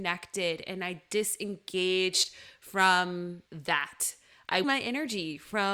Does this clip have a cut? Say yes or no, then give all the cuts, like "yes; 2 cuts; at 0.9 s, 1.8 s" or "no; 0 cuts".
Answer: yes; 2 cuts; at 3.5 s, 4.6 s